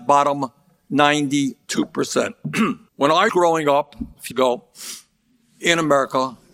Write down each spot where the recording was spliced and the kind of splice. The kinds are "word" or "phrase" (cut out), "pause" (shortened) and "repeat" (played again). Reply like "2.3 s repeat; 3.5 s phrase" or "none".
2.9 s pause; 3.3 s word; 4.3 s word